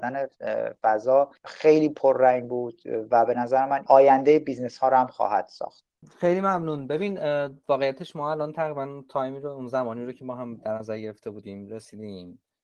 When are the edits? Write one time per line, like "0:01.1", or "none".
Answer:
0:03.9
0:06.0

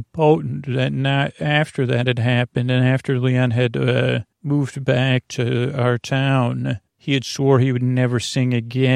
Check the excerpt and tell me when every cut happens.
0:04.3
0:05.2
0:06.9

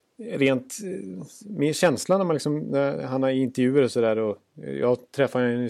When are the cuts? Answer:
none

